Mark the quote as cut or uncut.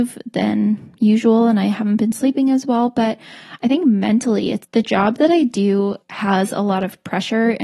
cut